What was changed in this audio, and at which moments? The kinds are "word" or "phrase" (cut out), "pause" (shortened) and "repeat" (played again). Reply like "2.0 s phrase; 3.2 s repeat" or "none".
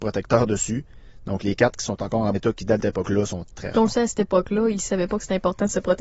2.3 s word; 2.8 s word; 3.5 s word